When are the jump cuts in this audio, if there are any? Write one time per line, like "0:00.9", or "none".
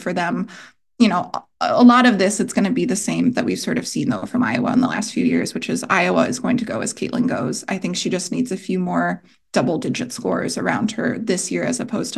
none